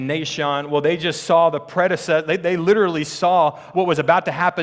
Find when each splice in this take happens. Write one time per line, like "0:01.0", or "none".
0:03.7